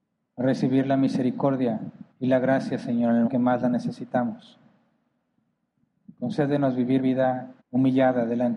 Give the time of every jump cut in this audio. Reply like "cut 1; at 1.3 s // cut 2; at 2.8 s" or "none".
cut 1; at 2.1 s // cut 2; at 3.3 s // cut 3; at 6.1 s // cut 4; at 7.0 s // cut 5; at 7.6 s